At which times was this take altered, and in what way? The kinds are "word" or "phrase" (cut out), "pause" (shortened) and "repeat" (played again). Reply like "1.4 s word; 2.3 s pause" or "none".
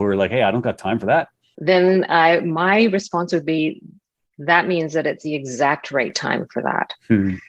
none